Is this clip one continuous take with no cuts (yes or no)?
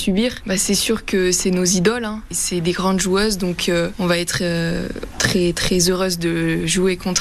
yes